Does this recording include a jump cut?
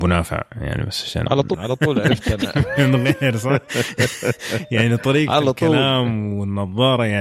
yes; 1 cut; at 1.5 s

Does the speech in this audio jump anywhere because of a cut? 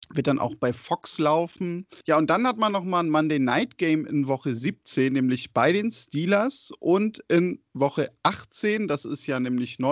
yes; 1 cut; at 2.0 s

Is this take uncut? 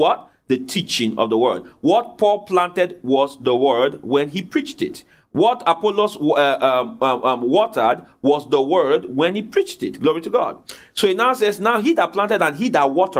yes; 0 cuts

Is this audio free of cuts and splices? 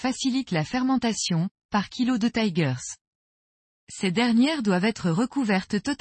yes; 0 cuts

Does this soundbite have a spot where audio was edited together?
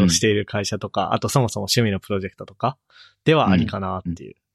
no; 0 cuts

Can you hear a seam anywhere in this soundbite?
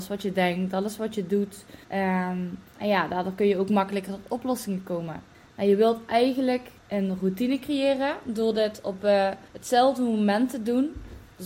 yes; 4 cuts; at 1.8 s, 5.3 s, 6.8 s, 9.5 s

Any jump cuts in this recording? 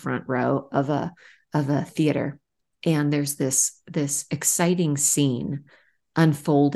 no; 0 cuts

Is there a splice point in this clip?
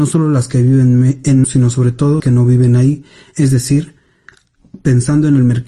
yes; 2 cuts; at 1.4 s, 2.2 s

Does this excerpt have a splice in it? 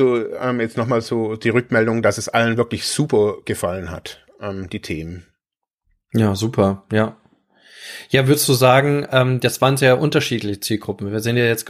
no; 0 cuts

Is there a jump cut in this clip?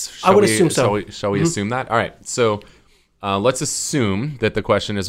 no; 0 cuts

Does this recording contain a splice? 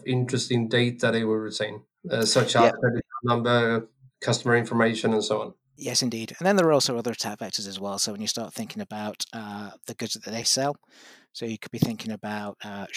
no; 0 cuts

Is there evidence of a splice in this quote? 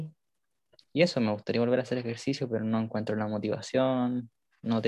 no; 0 cuts

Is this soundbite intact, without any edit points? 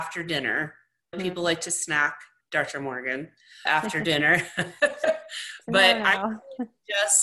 no; 3 cuts; at 1.1 s, 2.4 s, 3.7 s

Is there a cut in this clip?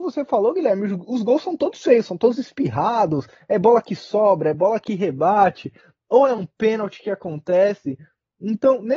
no; 0 cuts

